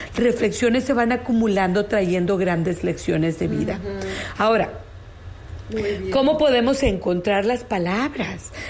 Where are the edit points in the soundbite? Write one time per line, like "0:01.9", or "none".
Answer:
none